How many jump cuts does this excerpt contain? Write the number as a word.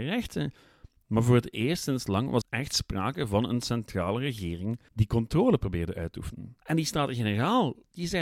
three